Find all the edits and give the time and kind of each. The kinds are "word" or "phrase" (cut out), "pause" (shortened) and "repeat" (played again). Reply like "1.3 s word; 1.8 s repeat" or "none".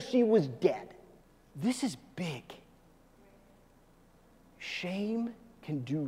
1.2 s pause